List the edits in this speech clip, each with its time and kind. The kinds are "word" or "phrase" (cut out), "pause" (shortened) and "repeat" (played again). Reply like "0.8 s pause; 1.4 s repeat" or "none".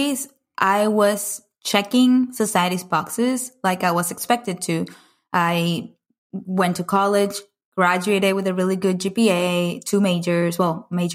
none